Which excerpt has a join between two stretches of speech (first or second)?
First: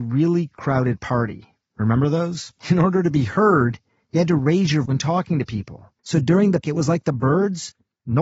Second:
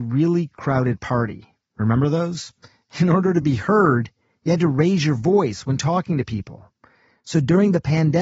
first